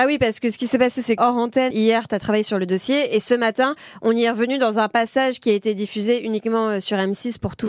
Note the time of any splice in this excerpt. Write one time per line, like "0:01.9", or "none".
0:01.2
0:01.7